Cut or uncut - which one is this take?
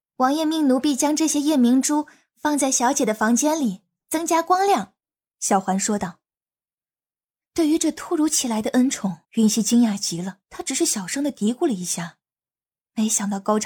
cut